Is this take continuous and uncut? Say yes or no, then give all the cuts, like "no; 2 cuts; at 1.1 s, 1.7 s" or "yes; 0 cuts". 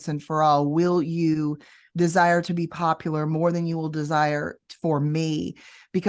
yes; 0 cuts